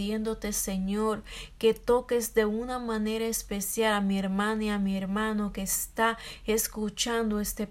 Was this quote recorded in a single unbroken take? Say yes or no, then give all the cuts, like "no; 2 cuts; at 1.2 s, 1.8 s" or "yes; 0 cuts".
yes; 0 cuts